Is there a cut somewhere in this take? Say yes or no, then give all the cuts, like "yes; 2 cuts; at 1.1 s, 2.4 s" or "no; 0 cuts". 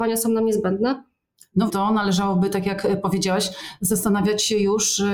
yes; 1 cut; at 1.7 s